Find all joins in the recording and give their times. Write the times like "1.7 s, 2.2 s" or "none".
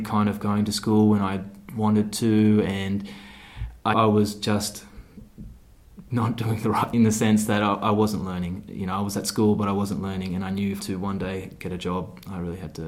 3.9 s, 6.0 s, 6.9 s, 10.8 s